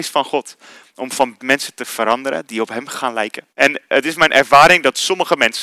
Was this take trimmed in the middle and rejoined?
yes; 2 cuts; at 1.4 s, 3.5 s

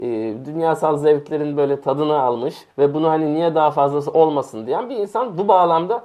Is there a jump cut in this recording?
yes; 1 cut; at 2.7 s

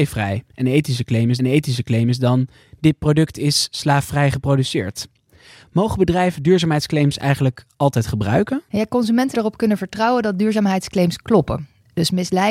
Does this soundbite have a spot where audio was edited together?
yes; 3 cuts; at 1.4 s, 8.7 s, 9.3 s

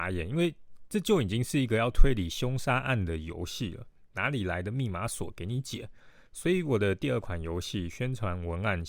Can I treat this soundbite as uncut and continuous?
no; 1 cut; at 6.3 s

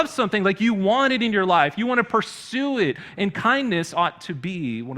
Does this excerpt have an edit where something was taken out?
no; 0 cuts

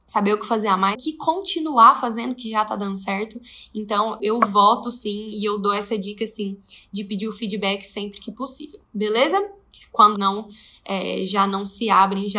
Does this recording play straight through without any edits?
no; 4 cuts; at 0.9 s, 4.2 s, 8.8 s, 10.2 s

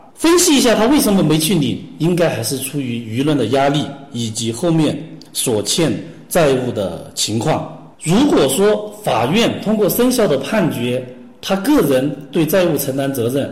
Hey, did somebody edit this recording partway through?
yes; 1 cut; at 7.9 s

